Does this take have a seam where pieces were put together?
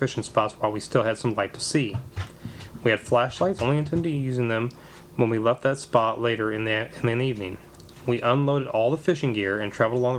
yes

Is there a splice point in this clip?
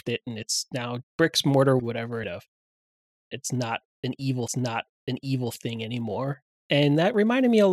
yes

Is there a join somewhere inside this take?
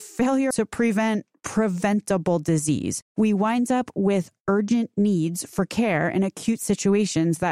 no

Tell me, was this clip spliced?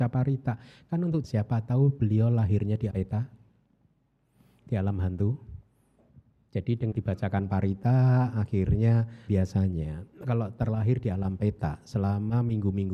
yes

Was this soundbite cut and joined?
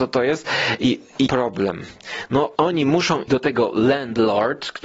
yes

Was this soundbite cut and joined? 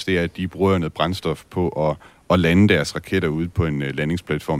no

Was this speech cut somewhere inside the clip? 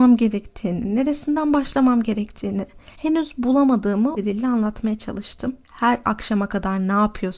yes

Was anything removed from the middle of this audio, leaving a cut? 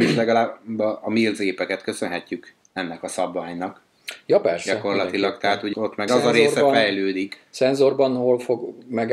yes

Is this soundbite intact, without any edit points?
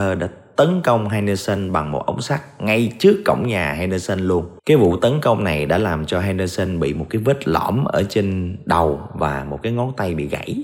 no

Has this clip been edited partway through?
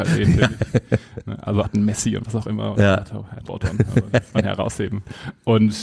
yes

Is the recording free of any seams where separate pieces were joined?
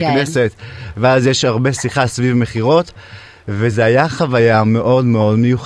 yes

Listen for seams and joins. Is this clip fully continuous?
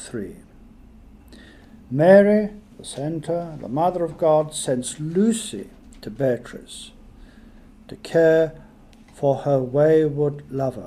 yes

